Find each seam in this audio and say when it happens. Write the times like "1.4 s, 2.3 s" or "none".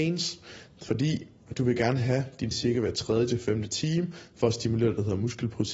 2.5 s